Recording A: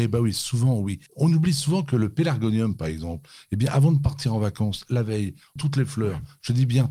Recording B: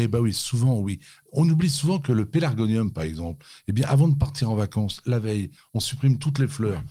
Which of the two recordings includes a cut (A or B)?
A